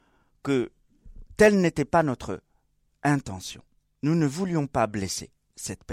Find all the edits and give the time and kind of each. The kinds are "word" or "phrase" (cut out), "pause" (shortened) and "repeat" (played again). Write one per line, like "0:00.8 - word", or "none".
none

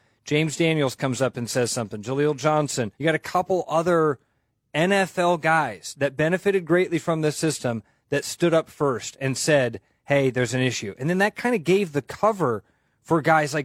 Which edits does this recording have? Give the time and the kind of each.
0:02.9 - pause

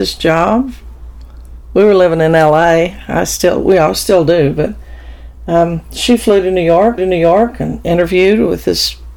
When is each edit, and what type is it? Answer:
0:07.0 - repeat

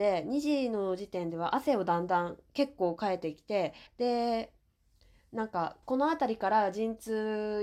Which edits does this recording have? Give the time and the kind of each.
0:03.9 - pause
0:05.8 - pause

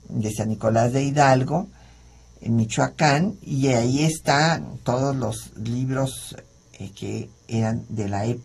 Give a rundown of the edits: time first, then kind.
none

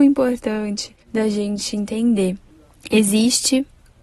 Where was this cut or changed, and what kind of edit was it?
0:01.0 - pause

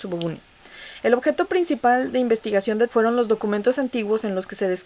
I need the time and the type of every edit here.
0:02.9 - word

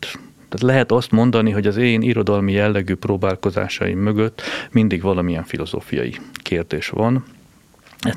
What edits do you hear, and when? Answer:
none

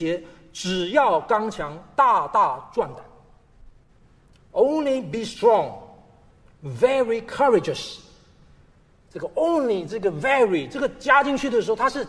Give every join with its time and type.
none

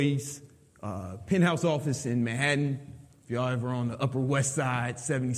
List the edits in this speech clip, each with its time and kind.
none

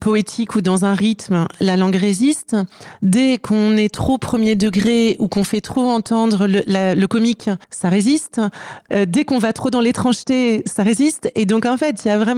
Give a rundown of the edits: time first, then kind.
0:07.6 - pause

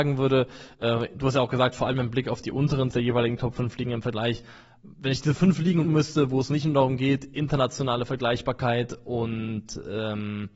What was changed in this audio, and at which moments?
0:02.9 - word
0:04.9 - pause
0:05.8 - word

